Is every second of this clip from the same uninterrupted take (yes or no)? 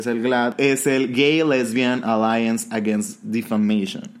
yes